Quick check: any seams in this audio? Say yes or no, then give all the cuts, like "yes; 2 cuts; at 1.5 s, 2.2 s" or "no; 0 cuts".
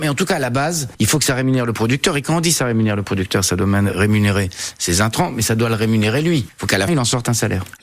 yes; 1 cut; at 6.9 s